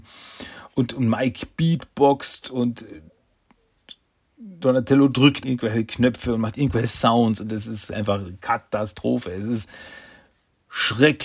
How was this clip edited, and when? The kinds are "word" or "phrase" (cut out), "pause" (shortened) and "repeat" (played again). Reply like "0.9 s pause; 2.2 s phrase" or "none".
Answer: 5.4 s word